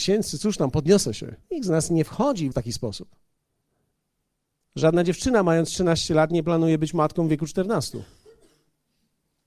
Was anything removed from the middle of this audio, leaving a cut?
yes; 3 cuts; at 1.4 s, 2.5 s, 3.9 s

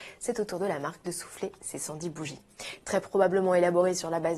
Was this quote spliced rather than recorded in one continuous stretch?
no; 0 cuts

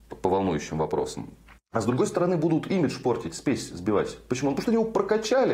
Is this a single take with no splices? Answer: yes; 0 cuts

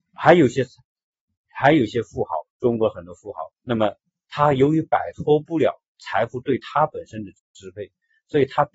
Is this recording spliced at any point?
yes; 2 cuts; at 3.6 s, 7.4 s

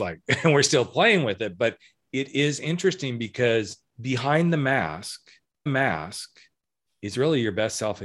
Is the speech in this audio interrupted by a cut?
yes; 2 cuts; at 3.9 s, 5.7 s

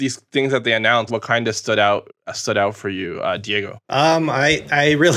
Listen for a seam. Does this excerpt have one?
yes; 3 cuts; at 1.1 s, 2.2 s, 3.8 s

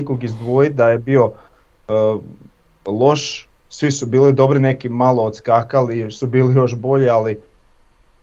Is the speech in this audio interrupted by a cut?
no; 0 cuts

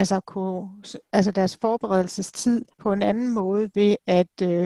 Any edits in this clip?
yes; 1 cut; at 2.7 s

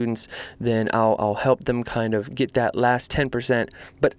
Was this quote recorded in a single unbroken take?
yes; 0 cuts

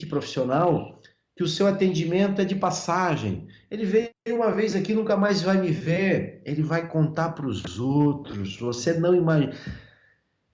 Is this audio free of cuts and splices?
yes; 0 cuts

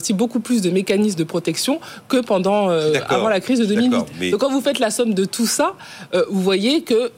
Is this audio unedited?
yes; 0 cuts

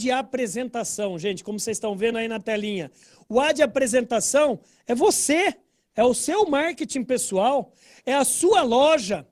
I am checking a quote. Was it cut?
no; 0 cuts

